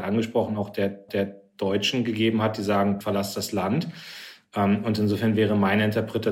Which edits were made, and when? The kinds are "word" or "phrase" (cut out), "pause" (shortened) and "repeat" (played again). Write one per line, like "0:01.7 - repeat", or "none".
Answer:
0:01.1 - repeat
0:03.0 - word